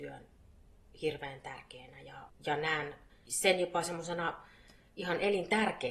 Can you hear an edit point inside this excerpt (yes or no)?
no